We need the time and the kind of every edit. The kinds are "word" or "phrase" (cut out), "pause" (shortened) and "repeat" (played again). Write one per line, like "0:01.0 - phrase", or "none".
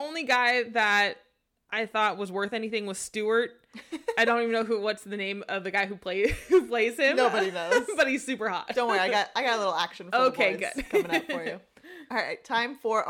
none